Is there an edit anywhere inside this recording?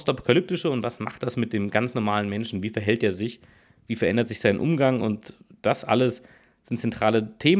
no; 0 cuts

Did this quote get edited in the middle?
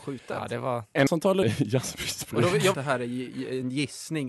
yes; 3 cuts; at 1.1 s, 1.4 s, 2.7 s

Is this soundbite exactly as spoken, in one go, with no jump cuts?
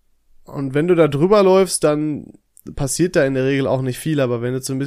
yes; 0 cuts

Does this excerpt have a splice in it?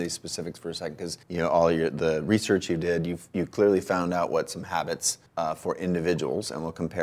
yes; 2 cuts; at 1.2 s, 5.3 s

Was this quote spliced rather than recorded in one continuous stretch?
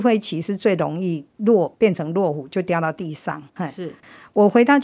yes; 2 cuts; at 1.3 s, 3.5 s

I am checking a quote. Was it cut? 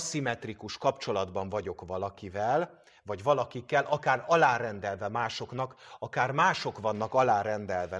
no; 0 cuts

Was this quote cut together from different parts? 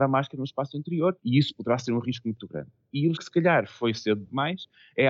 yes; 2 cuts; at 1.2 s, 3.2 s

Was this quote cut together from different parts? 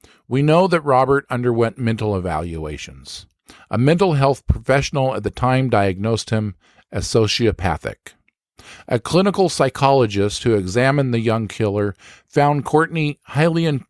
no; 0 cuts

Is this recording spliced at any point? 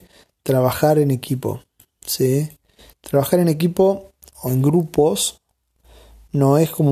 no; 0 cuts

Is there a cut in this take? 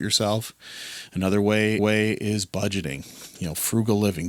yes; 1 cut; at 1.8 s

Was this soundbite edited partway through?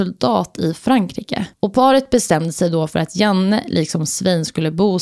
yes; 1 cut; at 1.5 s

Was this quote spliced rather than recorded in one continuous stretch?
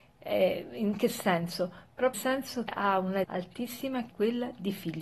yes; 4 cuts; at 2.1 s, 2.7 s, 3.2 s, 4.1 s

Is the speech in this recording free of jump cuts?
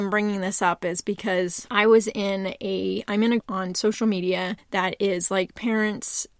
no; 1 cut; at 3.4 s

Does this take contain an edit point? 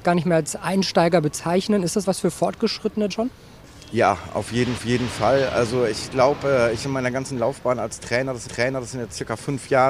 yes; 5 cuts; at 2.0 s, 3.1 s, 4.8 s, 6.8 s, 8.5 s

